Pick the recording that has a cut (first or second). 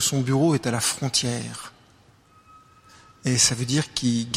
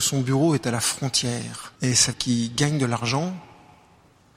second